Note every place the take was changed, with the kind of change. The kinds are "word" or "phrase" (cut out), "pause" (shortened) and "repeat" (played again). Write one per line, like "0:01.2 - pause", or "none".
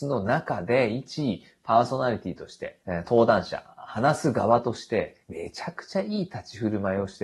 0:02.8 - pause
0:05.2 - pause